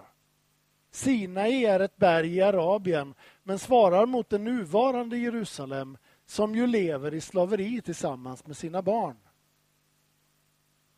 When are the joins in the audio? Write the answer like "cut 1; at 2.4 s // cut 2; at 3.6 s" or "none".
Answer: none

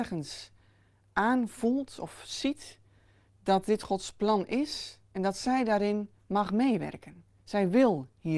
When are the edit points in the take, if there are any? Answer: none

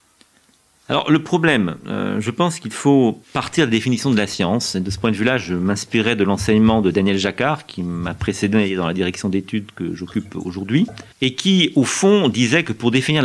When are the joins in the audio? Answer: cut 1; at 3.2 s // cut 2; at 11.1 s

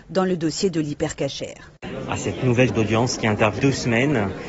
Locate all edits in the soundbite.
cut 1; at 2.7 s // cut 2; at 3.6 s

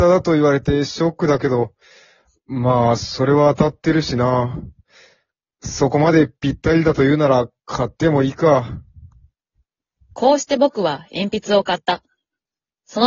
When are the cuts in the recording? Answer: none

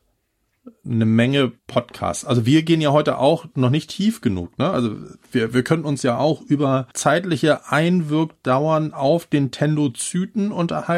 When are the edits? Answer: cut 1; at 1.6 s // cut 2; at 6.9 s

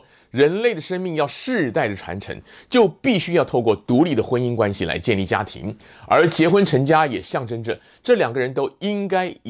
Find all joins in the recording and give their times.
none

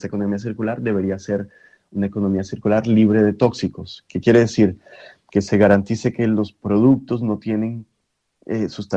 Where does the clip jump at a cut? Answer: none

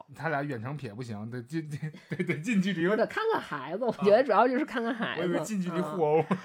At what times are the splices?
none

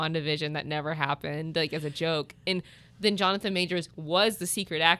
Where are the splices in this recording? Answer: none

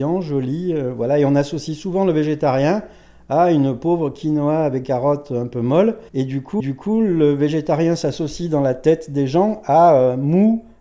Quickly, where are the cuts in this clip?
cut 1; at 4.8 s // cut 2; at 6.1 s // cut 3; at 6.6 s

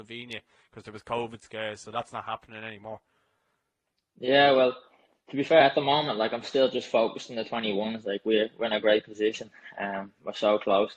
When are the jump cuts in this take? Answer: none

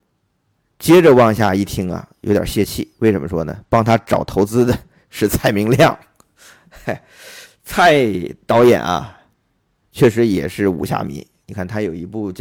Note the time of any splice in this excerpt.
none

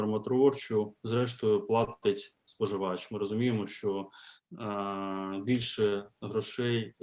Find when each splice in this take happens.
none

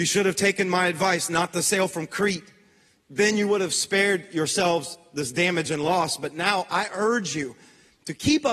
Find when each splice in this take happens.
none

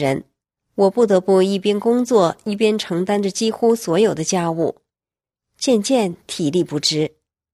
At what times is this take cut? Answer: none

